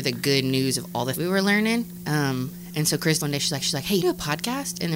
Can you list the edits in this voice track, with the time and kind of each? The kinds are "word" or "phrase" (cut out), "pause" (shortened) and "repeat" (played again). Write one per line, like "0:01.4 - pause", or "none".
0:01.2 - word
0:03.2 - word
0:03.6 - repeat
0:04.0 - word